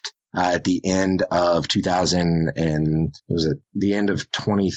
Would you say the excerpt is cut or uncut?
uncut